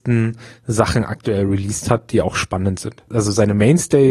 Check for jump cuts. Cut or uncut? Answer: uncut